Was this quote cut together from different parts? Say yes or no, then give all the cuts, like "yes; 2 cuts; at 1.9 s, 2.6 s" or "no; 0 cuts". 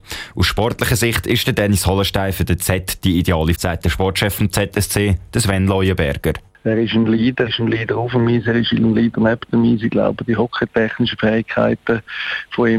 yes; 2 cuts; at 3.5 s, 7.5 s